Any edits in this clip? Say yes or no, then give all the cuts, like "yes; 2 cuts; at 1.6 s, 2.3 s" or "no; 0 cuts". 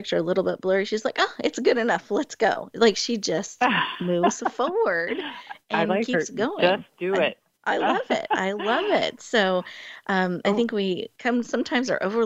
yes; 1 cut; at 7.5 s